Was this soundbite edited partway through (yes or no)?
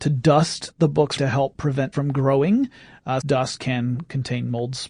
yes